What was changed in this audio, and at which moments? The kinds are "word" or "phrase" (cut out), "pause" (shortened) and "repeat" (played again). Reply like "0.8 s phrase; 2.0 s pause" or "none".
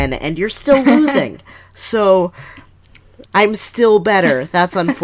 3.3 s word